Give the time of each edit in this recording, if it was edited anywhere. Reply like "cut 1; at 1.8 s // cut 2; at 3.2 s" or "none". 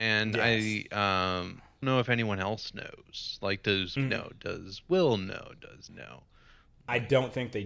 cut 1; at 1.8 s // cut 2; at 4.0 s // cut 3; at 5.9 s